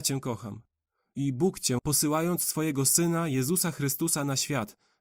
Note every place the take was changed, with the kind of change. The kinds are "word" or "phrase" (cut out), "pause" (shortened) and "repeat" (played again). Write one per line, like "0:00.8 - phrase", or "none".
0:01.8 - word